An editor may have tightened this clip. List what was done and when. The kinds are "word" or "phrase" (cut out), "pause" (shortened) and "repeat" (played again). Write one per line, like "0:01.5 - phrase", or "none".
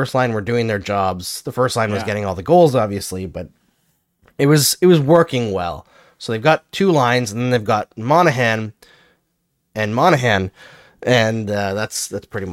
none